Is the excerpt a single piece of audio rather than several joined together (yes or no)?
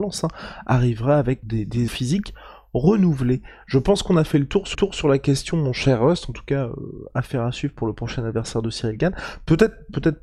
no